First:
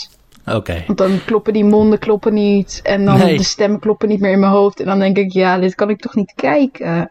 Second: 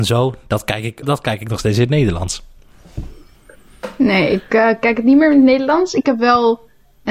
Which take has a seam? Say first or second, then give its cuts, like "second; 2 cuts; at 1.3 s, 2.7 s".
second; 1 cut; at 1.0 s